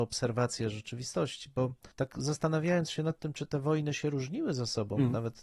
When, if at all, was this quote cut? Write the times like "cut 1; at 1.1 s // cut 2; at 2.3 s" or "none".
cut 1; at 1.9 s